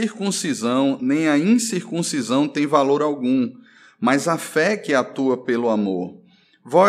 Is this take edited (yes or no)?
no